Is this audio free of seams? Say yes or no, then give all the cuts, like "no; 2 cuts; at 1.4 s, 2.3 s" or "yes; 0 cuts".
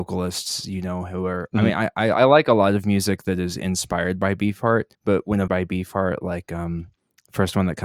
no; 2 cuts; at 4.9 s, 5.5 s